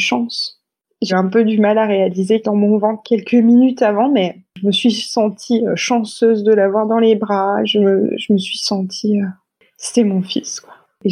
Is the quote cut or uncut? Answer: cut